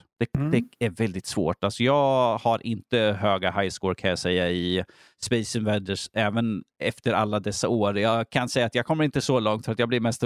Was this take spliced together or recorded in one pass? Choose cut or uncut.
uncut